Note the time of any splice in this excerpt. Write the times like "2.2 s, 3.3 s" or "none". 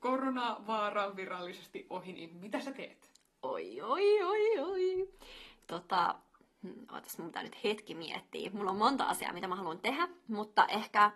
none